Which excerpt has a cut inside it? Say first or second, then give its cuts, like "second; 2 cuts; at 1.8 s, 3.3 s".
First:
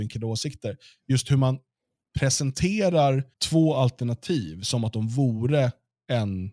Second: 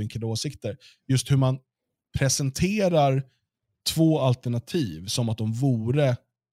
first; 1 cut; at 3.3 s